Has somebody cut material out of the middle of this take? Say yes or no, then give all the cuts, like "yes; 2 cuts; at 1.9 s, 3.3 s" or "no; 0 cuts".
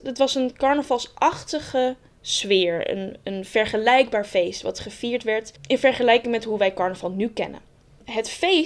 no; 0 cuts